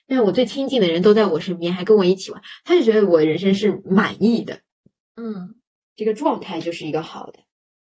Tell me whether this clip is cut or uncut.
uncut